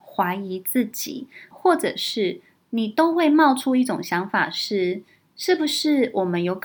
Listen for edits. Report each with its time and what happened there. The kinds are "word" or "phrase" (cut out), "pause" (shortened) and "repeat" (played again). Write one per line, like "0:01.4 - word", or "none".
0:01.5 - word